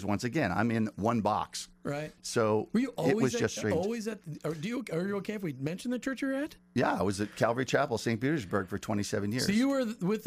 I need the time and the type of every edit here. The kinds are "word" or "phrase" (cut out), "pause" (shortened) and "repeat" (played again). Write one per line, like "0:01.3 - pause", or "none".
none